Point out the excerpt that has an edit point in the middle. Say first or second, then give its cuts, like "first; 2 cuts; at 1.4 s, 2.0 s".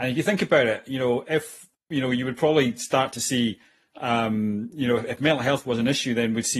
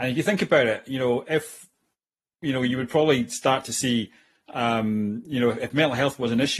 first; 1 cut; at 1.7 s